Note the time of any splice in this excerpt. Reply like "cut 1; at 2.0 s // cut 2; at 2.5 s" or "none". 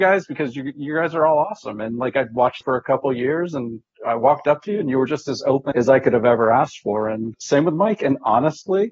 cut 1; at 2.6 s // cut 2; at 5.7 s // cut 3; at 7.3 s